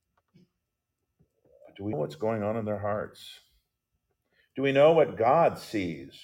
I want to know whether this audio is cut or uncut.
cut